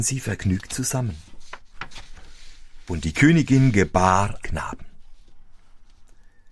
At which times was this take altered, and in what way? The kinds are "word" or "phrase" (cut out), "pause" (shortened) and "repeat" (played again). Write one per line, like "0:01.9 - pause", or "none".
0:04.4 - phrase